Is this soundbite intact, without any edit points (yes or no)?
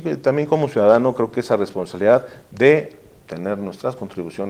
yes